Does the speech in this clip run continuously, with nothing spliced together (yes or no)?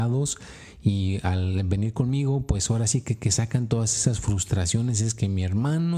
yes